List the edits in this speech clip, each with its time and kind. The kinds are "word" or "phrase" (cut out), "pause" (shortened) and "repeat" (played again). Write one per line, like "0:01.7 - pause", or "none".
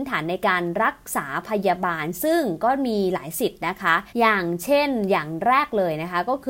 0:04.1 - pause

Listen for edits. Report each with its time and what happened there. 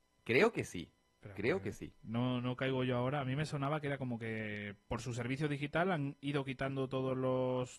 none

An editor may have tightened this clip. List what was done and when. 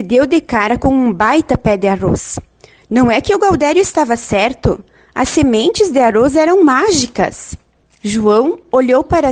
none

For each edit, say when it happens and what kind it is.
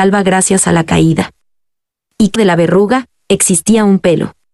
0:02.4 - word

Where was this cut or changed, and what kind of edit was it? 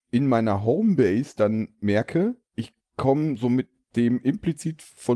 0:02.5 - pause

